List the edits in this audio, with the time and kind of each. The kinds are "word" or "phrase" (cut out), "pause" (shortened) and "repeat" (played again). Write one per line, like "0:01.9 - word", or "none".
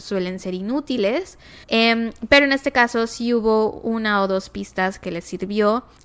0:01.6 - pause